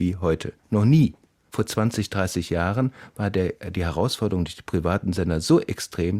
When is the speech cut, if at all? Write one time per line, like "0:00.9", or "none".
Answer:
0:01.2